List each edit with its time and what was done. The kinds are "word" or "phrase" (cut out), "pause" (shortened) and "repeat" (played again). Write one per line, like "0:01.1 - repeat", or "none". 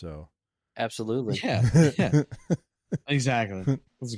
none

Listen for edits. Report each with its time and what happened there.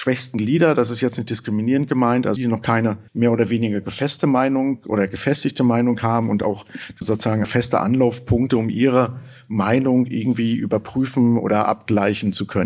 0:02.4 - word
0:03.1 - pause
0:07.0 - word
0:07.4 - word

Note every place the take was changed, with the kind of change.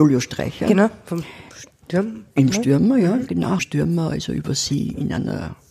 0:03.6 - phrase

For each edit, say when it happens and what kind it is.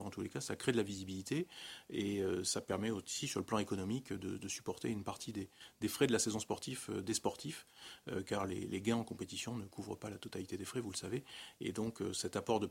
none

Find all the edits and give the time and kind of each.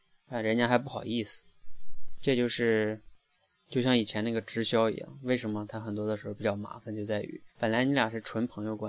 0:07.5 - pause

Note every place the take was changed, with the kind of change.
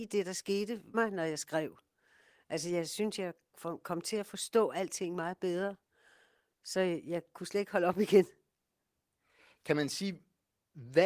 0:00.9 - word

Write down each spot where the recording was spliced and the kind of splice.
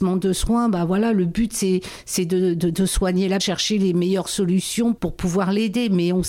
0:03.4 - phrase
0:05.0 - word

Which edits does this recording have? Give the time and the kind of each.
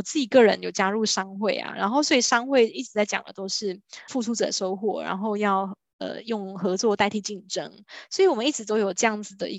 0:04.1 - word

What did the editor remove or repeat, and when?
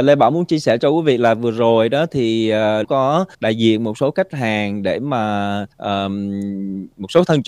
0:02.8 - phrase
0:03.3 - pause
0:05.7 - pause

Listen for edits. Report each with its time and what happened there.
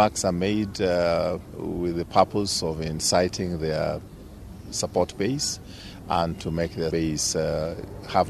0:01.5 - pause
0:06.9 - word

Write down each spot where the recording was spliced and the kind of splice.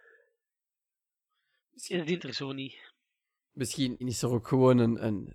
0:02.2 - word
0:04.0 - word

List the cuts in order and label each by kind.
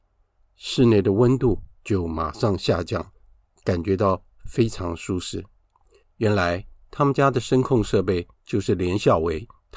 0:08.3 - pause

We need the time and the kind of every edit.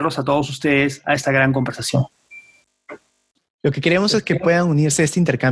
none

